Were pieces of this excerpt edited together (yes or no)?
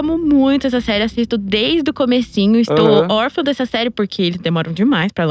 no